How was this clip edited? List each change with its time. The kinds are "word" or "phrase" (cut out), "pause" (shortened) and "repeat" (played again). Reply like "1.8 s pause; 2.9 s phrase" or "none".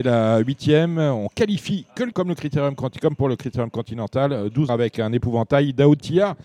2.1 s word; 4.7 s phrase